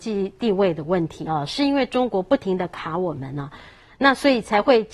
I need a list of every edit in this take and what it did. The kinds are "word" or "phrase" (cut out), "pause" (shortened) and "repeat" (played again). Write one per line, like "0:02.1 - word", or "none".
none